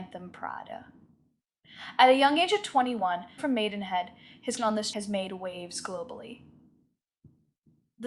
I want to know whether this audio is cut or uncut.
cut